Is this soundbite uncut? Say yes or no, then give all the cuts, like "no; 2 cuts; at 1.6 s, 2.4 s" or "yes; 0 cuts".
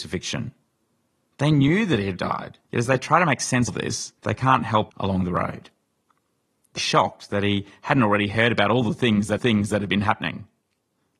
no; 7 cuts; at 2.2 s, 2.6 s, 3.7 s, 4.2 s, 4.9 s, 6.8 s, 9.4 s